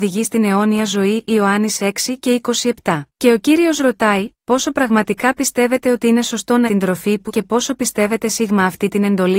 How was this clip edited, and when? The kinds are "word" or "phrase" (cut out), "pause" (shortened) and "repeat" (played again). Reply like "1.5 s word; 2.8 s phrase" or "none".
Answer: 3.1 s pause; 6.7 s phrase; 7.3 s phrase